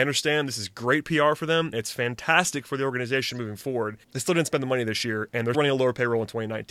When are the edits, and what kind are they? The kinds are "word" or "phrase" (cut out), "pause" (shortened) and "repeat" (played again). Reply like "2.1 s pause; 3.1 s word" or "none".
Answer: 1.7 s phrase; 4.0 s pause; 5.5 s word